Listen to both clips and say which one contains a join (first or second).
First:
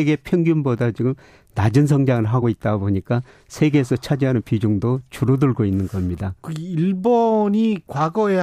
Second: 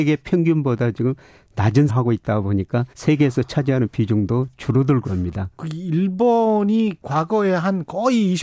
second